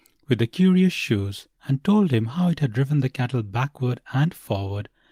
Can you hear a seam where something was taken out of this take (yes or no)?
yes